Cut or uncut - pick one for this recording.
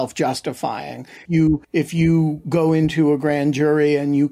cut